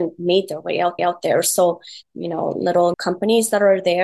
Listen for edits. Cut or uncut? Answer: cut